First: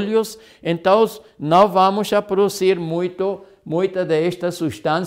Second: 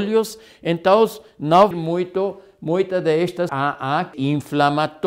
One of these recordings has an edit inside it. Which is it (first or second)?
second